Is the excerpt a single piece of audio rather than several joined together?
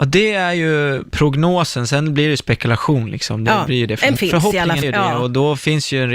no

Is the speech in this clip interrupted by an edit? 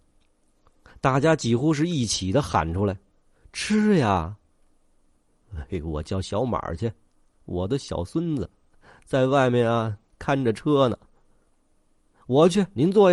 no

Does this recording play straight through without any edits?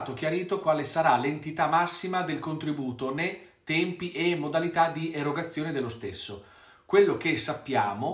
yes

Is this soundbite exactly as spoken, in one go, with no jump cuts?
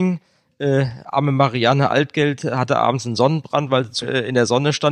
no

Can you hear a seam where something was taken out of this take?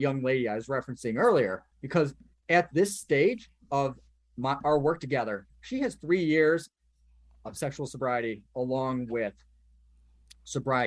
yes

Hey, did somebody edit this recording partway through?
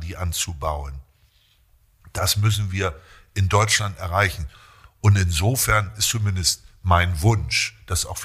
no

